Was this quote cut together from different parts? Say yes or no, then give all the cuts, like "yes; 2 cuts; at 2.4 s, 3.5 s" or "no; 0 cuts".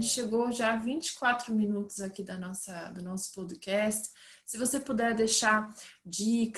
no; 0 cuts